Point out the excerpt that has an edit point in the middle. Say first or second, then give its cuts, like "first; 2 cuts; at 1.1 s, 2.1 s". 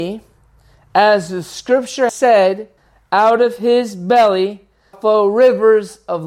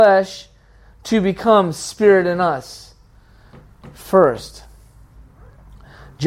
first; 3 cuts; at 2.1 s, 2.8 s, 4.9 s